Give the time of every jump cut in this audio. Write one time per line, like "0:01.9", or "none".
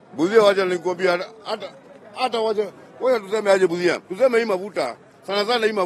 0:04.0